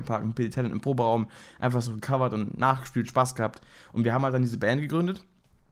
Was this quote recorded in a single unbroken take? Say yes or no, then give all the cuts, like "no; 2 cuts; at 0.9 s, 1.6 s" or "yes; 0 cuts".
yes; 0 cuts